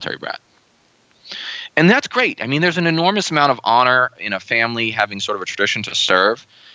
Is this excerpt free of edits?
yes; 0 cuts

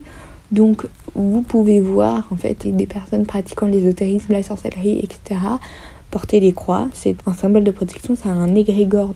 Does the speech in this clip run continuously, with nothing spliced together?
no; 2 cuts; at 2.6 s, 7.2 s

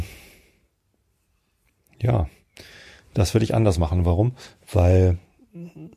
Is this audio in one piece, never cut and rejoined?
yes; 0 cuts

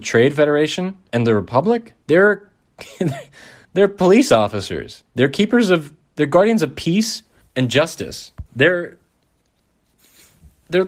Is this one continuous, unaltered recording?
no; 5 cuts; at 2.0 s, 3.6 s, 5.1 s, 7.4 s, 8.5 s

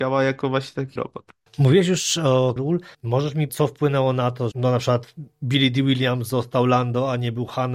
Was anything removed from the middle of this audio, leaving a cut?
yes; 6 cuts; at 1.0 s, 1.5 s, 2.6 s, 2.9 s, 3.5 s, 4.5 s

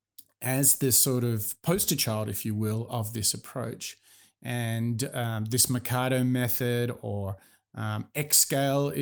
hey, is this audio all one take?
yes; 0 cuts

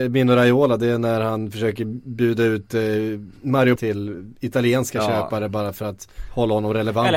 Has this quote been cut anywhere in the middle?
yes; 1 cut; at 3.8 s

